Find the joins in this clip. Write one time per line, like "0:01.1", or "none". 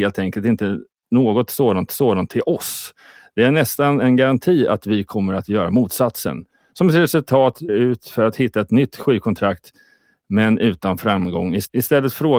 0:01.9
0:07.7